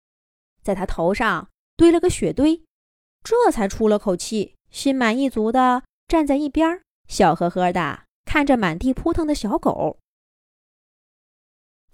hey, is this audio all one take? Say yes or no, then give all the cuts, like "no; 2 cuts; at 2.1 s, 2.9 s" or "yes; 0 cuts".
no; 4 cuts; at 2.8 s, 4.6 s, 6.9 s, 8.1 s